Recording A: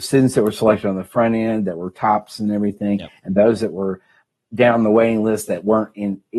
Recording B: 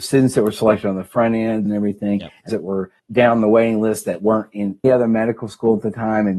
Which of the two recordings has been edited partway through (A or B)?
B